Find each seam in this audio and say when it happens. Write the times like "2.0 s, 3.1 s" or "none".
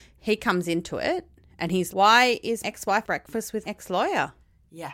1.9 s, 2.6 s, 3.0 s, 3.6 s